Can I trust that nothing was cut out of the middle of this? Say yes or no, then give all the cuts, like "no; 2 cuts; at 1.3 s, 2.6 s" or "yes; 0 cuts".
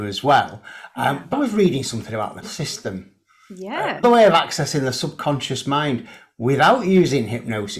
no; 3 cuts; at 1.3 s, 2.4 s, 4.0 s